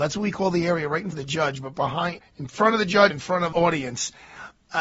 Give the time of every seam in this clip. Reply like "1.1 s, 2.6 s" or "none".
1.1 s, 2.2 s, 3.1 s, 3.5 s